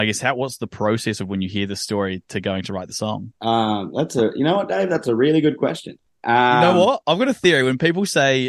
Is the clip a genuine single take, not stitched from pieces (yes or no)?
yes